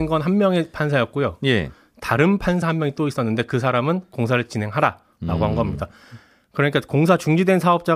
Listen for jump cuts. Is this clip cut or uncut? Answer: uncut